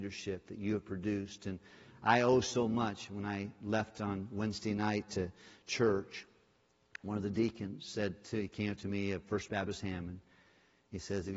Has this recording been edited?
no; 0 cuts

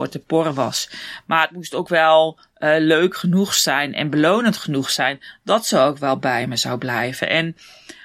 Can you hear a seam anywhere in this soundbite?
no; 0 cuts

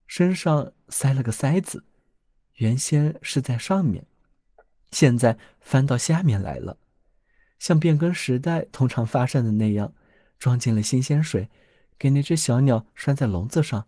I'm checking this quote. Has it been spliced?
no; 0 cuts

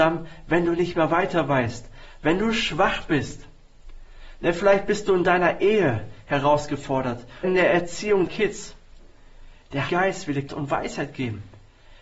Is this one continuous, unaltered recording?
no; 4 cuts; at 7.4 s, 8.3 s, 9.9 s, 10.5 s

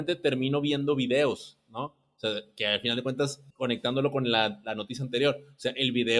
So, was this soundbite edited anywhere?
yes; 1 cut; at 3.5 s

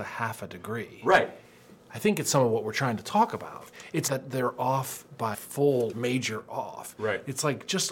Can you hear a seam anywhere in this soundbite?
yes; 3 cuts; at 4.1 s, 5.3 s, 5.9 s

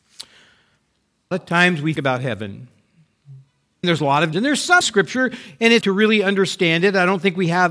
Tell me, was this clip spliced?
yes; 6 cuts; at 1.3 s, 2.0 s, 3.8 s, 4.3 s, 4.8 s, 5.8 s

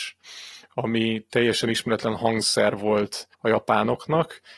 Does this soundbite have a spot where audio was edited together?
yes; 1 cut; at 3.3 s

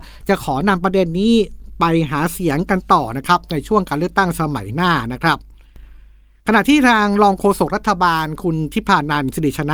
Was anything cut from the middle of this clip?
no; 0 cuts

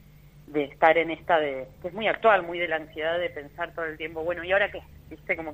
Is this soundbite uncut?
yes; 0 cuts

